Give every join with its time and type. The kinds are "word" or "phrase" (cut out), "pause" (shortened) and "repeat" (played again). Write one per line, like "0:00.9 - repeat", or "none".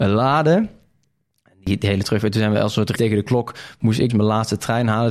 0:03.0 - word
0:04.1 - word